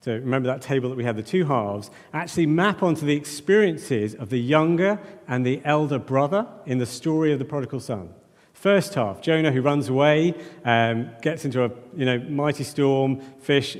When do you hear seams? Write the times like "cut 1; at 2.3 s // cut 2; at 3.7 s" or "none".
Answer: none